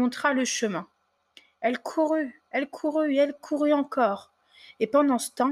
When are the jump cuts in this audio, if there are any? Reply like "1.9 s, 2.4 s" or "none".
none